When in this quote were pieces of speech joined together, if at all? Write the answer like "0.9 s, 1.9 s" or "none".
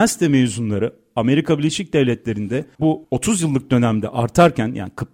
2.8 s